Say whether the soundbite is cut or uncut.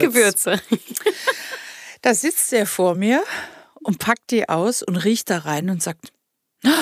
uncut